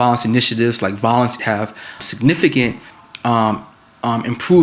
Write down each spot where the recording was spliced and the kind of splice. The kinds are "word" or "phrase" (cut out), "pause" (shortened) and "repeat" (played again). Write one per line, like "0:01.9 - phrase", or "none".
0:01.4 - word
0:02.0 - word